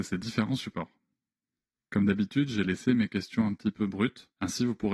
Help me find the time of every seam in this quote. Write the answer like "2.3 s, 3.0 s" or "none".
none